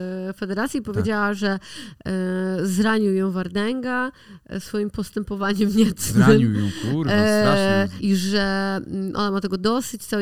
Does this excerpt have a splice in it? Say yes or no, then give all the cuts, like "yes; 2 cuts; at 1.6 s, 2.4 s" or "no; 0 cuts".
yes; 1 cut; at 8.0 s